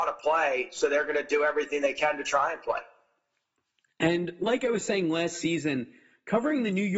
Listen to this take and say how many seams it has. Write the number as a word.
zero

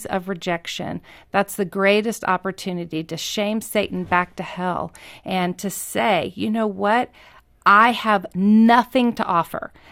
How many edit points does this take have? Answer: zero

